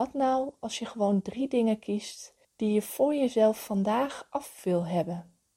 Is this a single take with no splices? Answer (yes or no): no